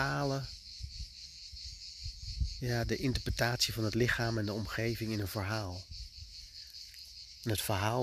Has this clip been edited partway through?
no; 0 cuts

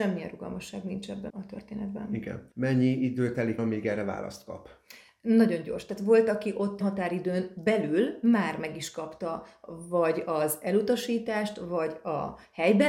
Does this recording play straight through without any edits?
no; 4 cuts; at 1.3 s, 2.5 s, 3.6 s, 6.8 s

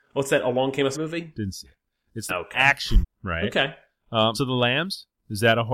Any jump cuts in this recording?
yes; 4 cuts; at 0.9 s, 2.3 s, 3.0 s, 4.3 s

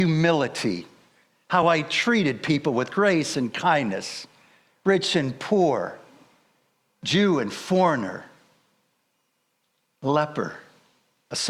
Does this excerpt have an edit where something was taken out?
no; 0 cuts

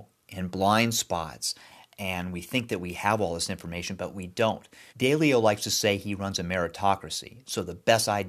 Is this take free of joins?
no; 1 cut; at 4.9 s

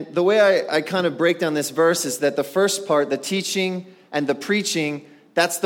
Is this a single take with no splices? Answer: yes; 0 cuts

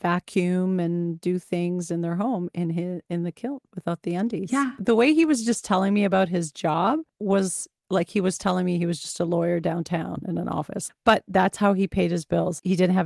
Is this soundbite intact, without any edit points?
yes; 0 cuts

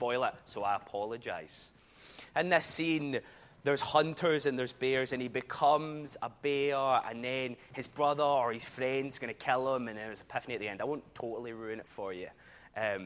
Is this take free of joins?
yes; 0 cuts

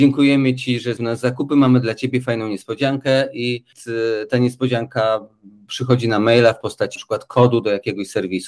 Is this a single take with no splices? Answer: no; 2 cuts; at 1.0 s, 7.0 s

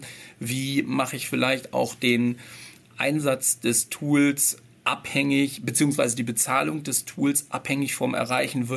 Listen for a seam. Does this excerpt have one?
no; 0 cuts

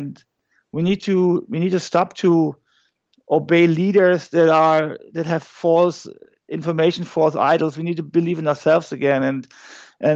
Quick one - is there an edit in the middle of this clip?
no; 0 cuts

